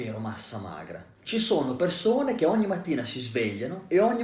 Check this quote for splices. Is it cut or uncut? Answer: uncut